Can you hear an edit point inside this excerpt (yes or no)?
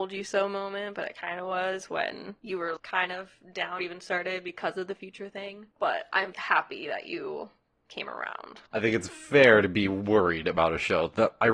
yes